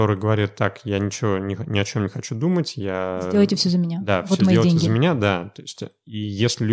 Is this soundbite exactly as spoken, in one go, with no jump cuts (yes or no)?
yes